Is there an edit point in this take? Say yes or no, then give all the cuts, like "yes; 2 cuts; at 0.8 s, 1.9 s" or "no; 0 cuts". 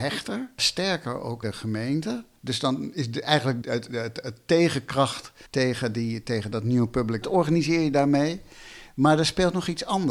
yes; 4 cuts; at 1.4 s, 3.6 s, 5.5 s, 7.2 s